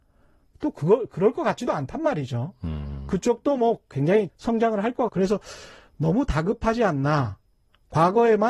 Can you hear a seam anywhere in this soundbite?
yes; 2 cuts; at 4.3 s, 5.1 s

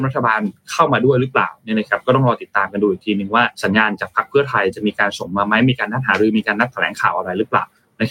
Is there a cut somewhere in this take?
yes; 1 cut; at 3.5 s

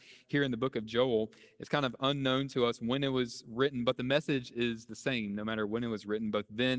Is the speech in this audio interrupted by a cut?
no; 0 cuts

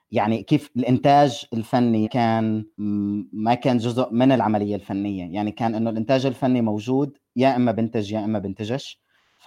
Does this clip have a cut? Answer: yes; 2 cuts; at 2.0 s, 2.7 s

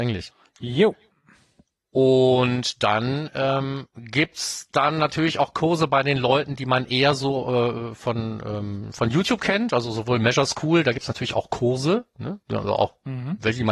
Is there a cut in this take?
no; 0 cuts

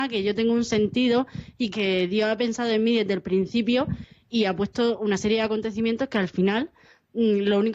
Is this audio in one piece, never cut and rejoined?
no; 2 cuts; at 1.7 s, 4.3 s

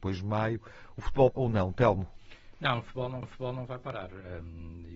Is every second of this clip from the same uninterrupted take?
no; 2 cuts; at 1.3 s, 3.2 s

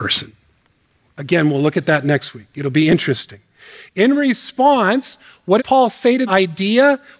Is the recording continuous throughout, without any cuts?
no; 2 cuts; at 5.6 s, 6.3 s

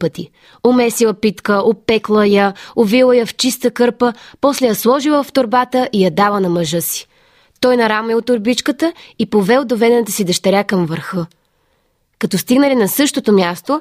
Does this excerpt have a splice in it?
no; 0 cuts

